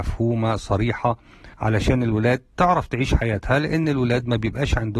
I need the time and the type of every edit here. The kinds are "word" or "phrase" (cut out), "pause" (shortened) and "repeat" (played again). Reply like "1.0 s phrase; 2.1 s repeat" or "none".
1.5 s pause